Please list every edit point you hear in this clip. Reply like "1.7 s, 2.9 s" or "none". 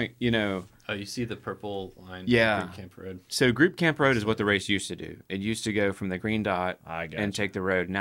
none